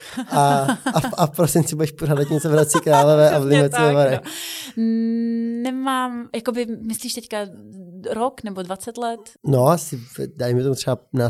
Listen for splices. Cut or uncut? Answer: cut